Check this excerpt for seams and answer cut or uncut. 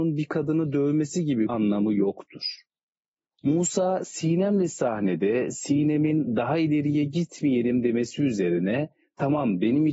cut